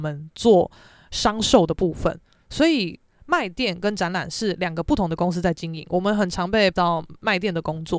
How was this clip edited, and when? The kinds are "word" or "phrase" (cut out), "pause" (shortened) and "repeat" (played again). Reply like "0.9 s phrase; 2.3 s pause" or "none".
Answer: 6.7 s word